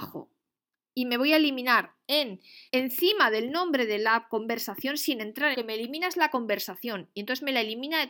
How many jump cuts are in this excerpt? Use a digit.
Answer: 2